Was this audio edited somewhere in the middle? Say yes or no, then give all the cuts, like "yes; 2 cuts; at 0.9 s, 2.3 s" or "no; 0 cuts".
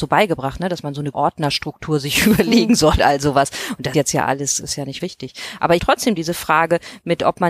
yes; 6 cuts; at 1.1 s, 3.0 s, 3.9 s, 4.6 s, 5.0 s, 5.8 s